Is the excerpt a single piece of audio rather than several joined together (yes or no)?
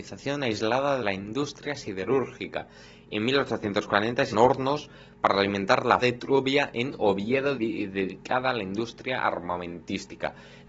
no